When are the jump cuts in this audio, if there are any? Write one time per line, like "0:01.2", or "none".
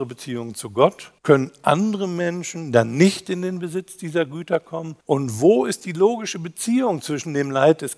0:01.2
0:05.0